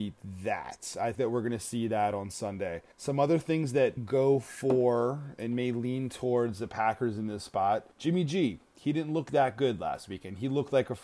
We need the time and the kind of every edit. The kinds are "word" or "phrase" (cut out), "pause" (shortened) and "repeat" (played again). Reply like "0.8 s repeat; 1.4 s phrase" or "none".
1.1 s word; 2.9 s pause; 4.0 s word; 7.9 s pause